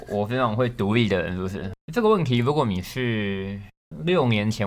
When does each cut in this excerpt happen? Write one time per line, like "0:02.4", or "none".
0:01.8

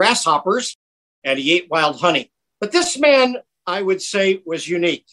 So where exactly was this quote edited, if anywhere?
none

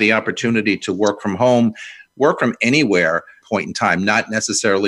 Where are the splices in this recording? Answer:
0:03.4

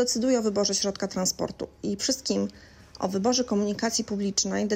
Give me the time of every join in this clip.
0:02.0

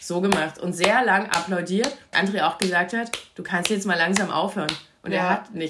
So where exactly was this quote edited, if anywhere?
0:02.1

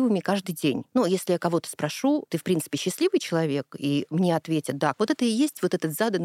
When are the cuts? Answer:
0:04.9

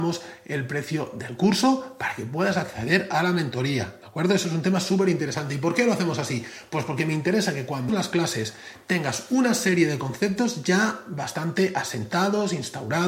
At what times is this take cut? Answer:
0:07.9

